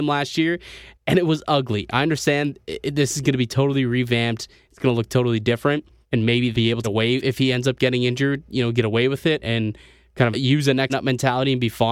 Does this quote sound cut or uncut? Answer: cut